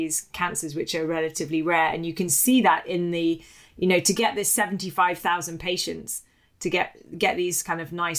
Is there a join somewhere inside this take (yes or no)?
no